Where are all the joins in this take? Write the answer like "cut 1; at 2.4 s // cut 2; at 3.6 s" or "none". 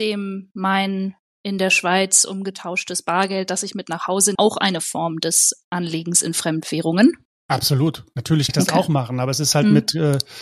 cut 1; at 4.3 s // cut 2; at 7.2 s // cut 3; at 8.5 s